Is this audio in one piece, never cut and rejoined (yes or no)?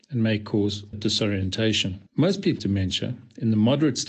no